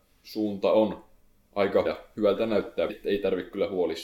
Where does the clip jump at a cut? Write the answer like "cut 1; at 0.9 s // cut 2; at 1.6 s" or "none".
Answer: cut 1; at 1.8 s // cut 2; at 2.9 s